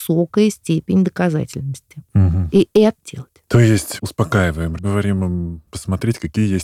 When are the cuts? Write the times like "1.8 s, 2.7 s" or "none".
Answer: 3.0 s, 4.0 s, 4.8 s, 5.7 s